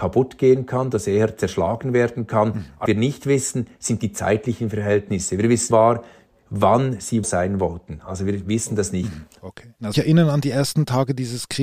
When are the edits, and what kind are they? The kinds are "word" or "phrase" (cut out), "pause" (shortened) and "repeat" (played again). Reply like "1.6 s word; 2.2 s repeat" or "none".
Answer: 2.9 s word; 5.7 s phrase; 7.2 s word; 9.9 s phrase

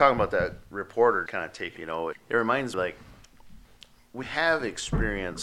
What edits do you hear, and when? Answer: 1.3 s word; 1.8 s word; 2.1 s word; 2.7 s word; 4.2 s word

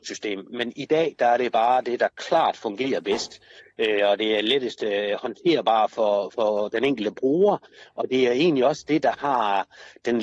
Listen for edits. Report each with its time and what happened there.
none

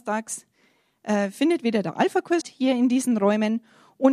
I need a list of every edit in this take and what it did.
2.4 s word

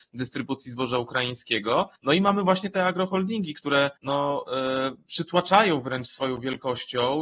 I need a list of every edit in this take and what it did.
2.0 s pause; 4.0 s pause

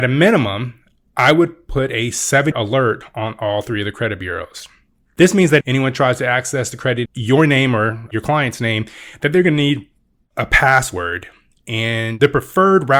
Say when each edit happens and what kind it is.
2.5 s word; 5.6 s word; 7.1 s word

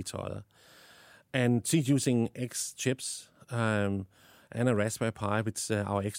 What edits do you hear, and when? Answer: none

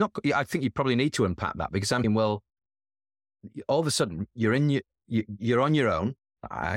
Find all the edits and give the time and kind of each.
2.0 s word

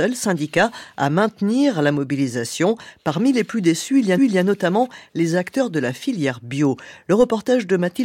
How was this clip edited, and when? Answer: 4.2 s repeat

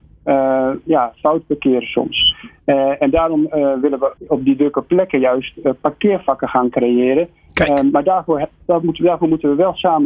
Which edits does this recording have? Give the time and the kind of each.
4.2 s pause

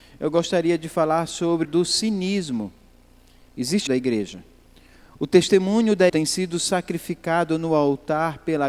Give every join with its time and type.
1.6 s phrase; 3.9 s phrase; 4.6 s pause; 6.1 s phrase

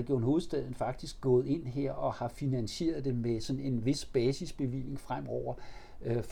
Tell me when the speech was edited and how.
none

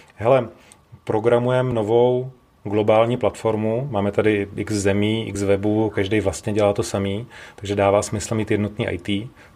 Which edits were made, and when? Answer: none

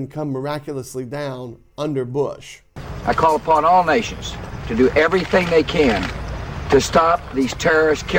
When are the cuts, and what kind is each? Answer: none

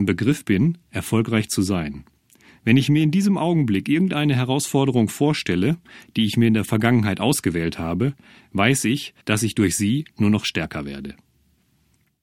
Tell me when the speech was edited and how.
9.2 s pause

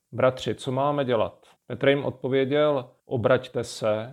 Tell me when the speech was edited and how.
1.6 s pause; 3.0 s pause

